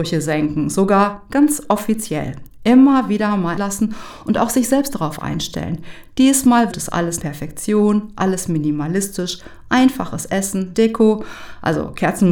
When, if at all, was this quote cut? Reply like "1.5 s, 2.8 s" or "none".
3.6 s, 6.7 s, 7.2 s, 10.7 s